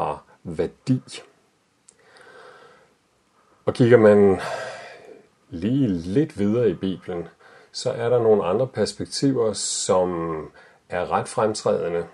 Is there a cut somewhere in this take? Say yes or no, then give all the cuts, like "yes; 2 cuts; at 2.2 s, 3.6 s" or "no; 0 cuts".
no; 0 cuts